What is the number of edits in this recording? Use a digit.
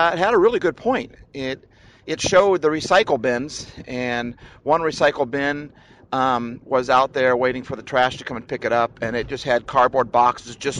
0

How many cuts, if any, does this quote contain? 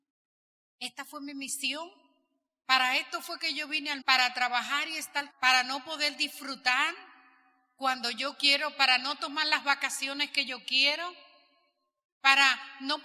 2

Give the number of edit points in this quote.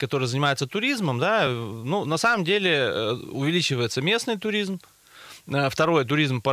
0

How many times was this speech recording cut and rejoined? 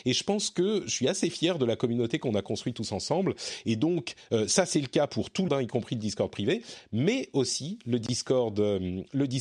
1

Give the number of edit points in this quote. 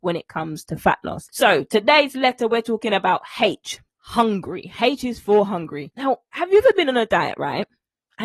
0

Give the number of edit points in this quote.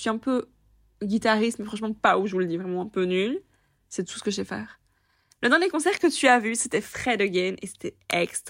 0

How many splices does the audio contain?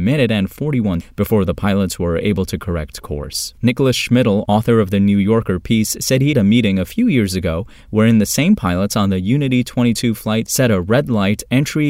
3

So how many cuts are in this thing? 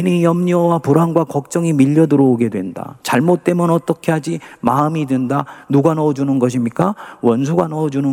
0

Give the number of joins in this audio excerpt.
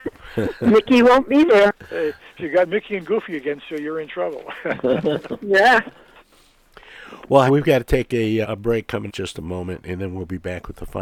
3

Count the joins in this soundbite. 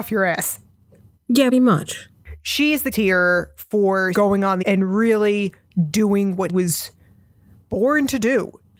5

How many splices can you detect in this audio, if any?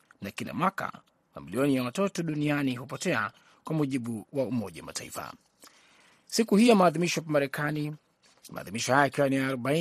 0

